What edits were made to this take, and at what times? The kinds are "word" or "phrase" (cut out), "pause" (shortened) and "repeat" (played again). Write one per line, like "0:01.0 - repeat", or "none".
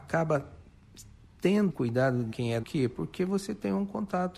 0:01.7 - word
0:02.3 - word
0:02.6 - phrase